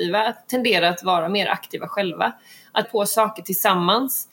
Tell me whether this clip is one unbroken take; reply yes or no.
no